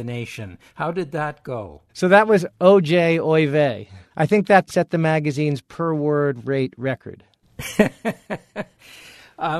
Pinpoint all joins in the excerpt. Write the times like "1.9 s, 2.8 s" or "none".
1.9 s, 4.1 s, 4.7 s